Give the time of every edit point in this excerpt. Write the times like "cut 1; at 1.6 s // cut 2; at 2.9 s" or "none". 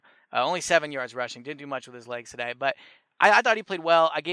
none

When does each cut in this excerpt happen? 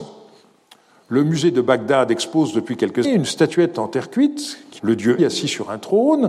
cut 1; at 3.0 s // cut 2; at 4.8 s // cut 3; at 5.2 s

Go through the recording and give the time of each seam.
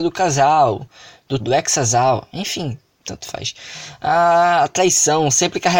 cut 1; at 1.4 s

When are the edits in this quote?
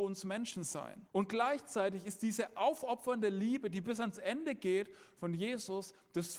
cut 1; at 1.1 s

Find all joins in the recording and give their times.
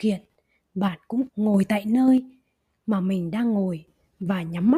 cut 1; at 1.3 s

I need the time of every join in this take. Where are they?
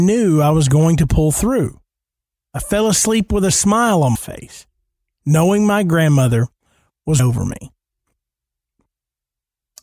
cut 1; at 4.2 s // cut 2; at 7.2 s

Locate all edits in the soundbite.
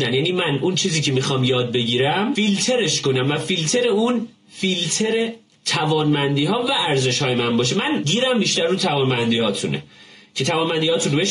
none

